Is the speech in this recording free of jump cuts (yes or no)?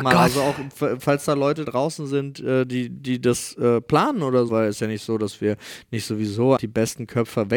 no